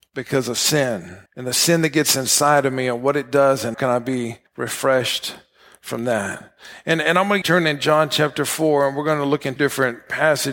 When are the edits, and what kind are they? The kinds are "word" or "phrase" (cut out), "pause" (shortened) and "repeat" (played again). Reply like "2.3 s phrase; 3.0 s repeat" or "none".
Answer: 1.3 s pause; 3.7 s word; 4.5 s pause; 7.4 s phrase; 9.6 s word